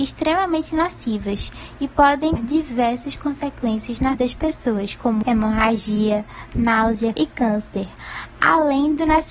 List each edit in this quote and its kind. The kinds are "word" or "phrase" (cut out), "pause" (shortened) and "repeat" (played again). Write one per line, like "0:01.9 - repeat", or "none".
0:02.4 - word
0:04.1 - word
0:05.2 - word
0:07.1 - word